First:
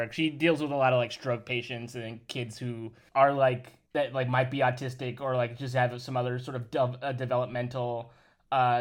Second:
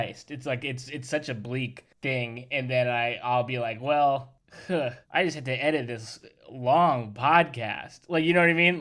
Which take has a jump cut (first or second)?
second